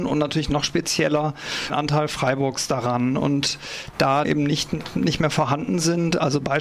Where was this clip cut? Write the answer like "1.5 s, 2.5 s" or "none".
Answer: 1.7 s, 4.2 s